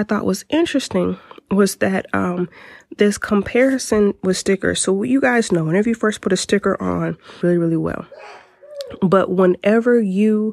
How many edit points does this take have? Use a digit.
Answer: 1